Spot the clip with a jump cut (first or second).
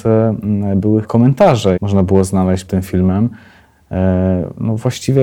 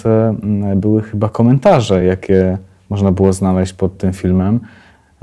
first